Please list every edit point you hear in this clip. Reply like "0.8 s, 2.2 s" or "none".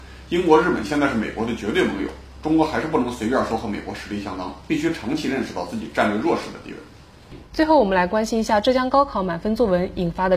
7.5 s